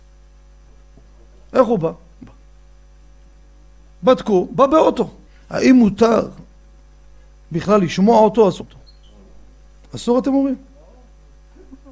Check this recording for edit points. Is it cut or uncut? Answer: cut